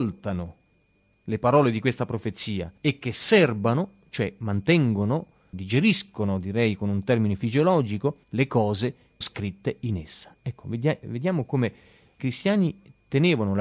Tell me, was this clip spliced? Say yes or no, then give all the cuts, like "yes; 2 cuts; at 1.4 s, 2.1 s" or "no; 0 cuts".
yes; 5 cuts; at 2.8 s, 5.5 s, 8.2 s, 9.2 s, 12.2 s